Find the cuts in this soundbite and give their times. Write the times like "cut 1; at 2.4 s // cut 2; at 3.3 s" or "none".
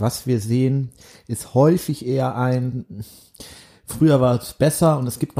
none